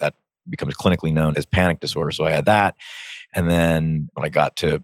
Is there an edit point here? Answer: yes; 1 cut; at 1.3 s

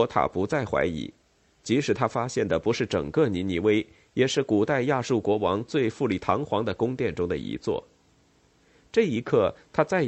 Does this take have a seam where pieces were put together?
no; 0 cuts

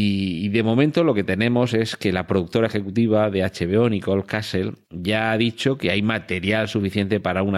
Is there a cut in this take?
yes; 1 cut; at 4.8 s

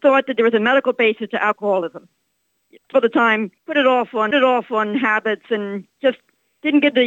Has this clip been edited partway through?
yes; 3 cuts; at 2.9 s, 3.6 s, 4.3 s

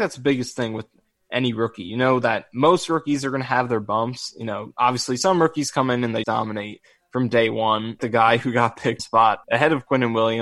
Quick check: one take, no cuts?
no; 4 cuts; at 6.2 s, 8.0 s, 9.0 s, 9.4 s

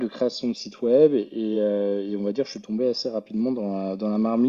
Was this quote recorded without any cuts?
yes; 0 cuts

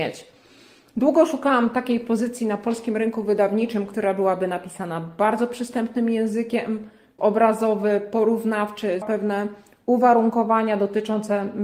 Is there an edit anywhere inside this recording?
yes; 2 cuts; at 7.2 s, 9.0 s

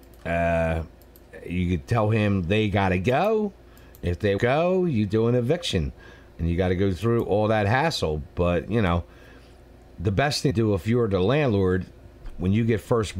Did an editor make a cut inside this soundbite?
yes; 2 cuts; at 4.4 s, 10.5 s

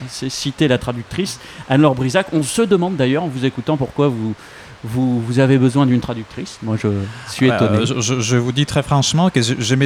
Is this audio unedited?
yes; 0 cuts

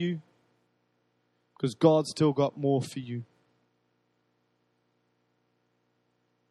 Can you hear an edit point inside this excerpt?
no; 0 cuts

